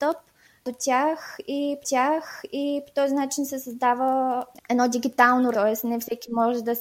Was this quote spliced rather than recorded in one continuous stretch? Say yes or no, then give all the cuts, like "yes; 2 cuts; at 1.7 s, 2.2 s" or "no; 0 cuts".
yes; 2 cuts; at 1.8 s, 5.5 s